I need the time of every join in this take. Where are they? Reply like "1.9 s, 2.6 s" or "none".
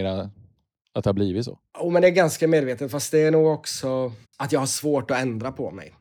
1.7 s, 4.2 s